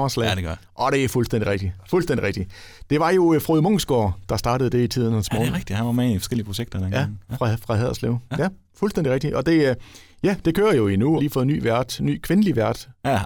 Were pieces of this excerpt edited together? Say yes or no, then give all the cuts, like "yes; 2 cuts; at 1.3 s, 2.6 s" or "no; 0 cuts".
yes; 1 cut; at 11.2 s